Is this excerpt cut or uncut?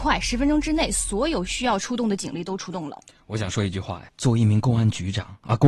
cut